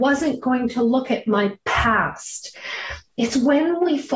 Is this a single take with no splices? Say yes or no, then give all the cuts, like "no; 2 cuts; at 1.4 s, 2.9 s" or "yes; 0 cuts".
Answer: yes; 0 cuts